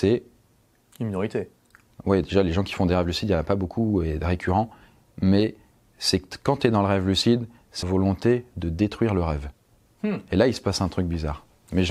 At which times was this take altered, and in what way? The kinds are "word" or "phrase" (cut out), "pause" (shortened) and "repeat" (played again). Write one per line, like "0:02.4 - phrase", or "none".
0:07.8 - phrase